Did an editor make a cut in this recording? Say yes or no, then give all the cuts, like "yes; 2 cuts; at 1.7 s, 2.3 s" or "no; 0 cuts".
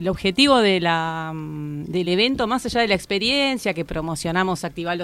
no; 0 cuts